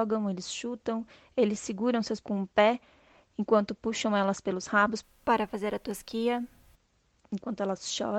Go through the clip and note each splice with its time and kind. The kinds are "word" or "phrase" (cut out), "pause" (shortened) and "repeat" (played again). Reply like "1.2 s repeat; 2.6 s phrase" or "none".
2.2 s word